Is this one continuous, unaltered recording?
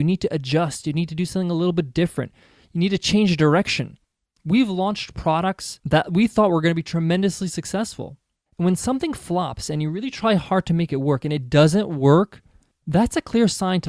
yes; 0 cuts

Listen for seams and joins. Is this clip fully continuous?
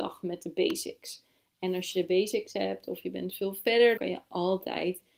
no; 1 cut; at 4.0 s

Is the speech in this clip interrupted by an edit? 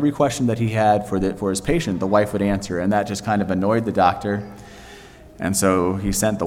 no; 0 cuts

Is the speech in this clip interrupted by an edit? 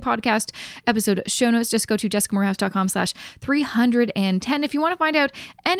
no; 0 cuts

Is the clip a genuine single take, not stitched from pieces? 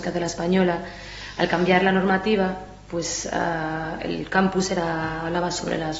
yes; 0 cuts

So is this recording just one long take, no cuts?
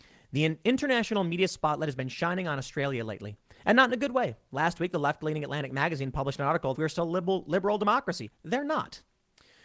no; 1 cut; at 6.7 s

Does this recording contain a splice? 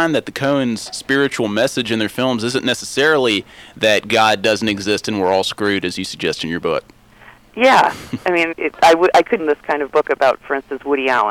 yes; 2 cuts; at 8.5 s, 9.4 s

